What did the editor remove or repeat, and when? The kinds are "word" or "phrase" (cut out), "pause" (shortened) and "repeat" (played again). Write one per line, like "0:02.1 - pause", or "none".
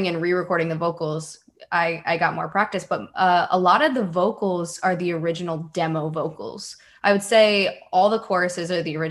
none